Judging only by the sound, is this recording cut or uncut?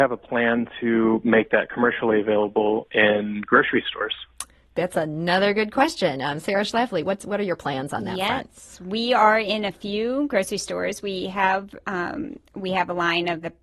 uncut